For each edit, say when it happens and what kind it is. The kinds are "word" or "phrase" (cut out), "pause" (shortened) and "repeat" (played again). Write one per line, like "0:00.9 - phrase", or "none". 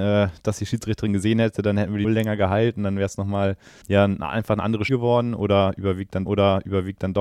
0:02.0 - word
0:03.8 - word
0:04.9 - word
0:06.3 - repeat